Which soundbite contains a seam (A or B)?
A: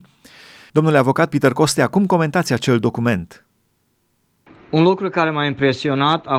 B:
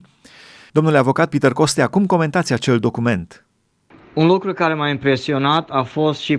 B